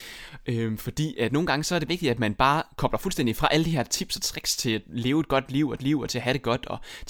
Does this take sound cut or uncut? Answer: cut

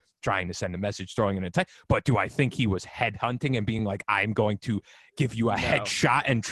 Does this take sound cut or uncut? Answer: uncut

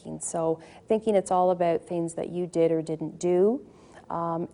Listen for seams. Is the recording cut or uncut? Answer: uncut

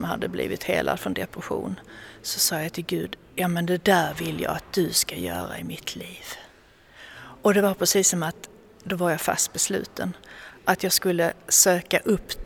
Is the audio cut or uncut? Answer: uncut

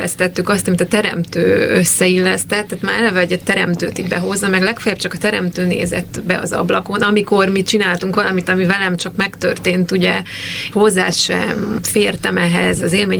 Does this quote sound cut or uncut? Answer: cut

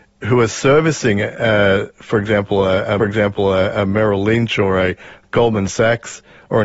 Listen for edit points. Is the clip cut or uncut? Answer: cut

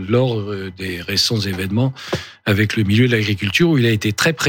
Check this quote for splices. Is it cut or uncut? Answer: uncut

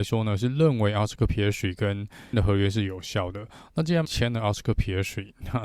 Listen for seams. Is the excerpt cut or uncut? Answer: cut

